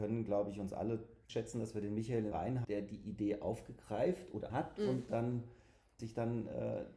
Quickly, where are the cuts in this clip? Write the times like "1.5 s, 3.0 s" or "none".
1.3 s, 2.3 s, 2.6 s, 4.5 s, 5.1 s, 6.0 s